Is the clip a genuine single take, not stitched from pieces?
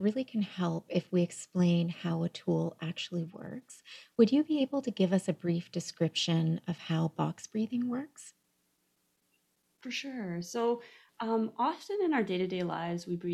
yes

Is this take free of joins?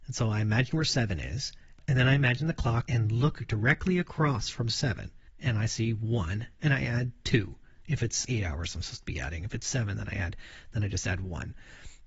no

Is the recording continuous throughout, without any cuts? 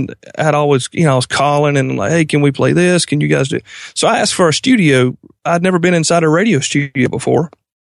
yes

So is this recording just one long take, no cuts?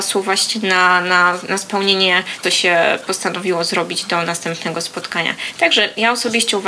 no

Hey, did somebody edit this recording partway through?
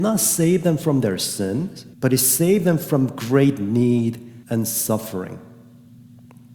yes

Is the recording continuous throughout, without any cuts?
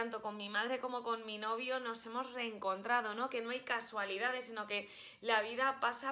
yes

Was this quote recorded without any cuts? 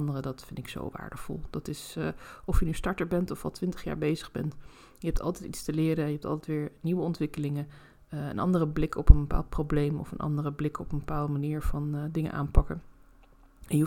yes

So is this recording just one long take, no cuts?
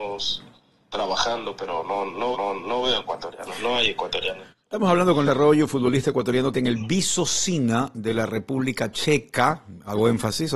no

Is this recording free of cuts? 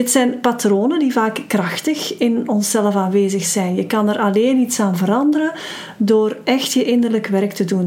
yes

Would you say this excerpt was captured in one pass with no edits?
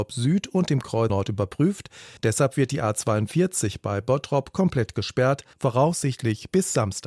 no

